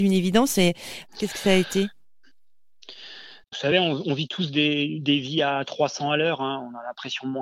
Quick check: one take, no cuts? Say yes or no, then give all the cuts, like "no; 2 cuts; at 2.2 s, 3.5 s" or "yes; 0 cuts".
yes; 0 cuts